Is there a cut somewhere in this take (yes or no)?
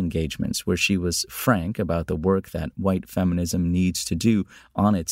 no